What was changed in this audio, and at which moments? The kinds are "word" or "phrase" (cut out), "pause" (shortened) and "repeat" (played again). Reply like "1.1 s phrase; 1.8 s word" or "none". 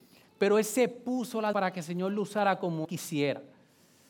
1.5 s word; 2.8 s word